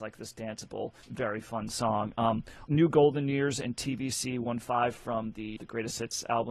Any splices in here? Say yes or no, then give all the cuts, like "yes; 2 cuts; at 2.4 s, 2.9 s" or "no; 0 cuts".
yes; 3 cuts; at 1.0 s, 2.7 s, 5.6 s